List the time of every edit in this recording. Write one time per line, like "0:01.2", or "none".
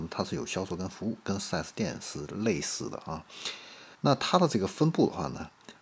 0:03.9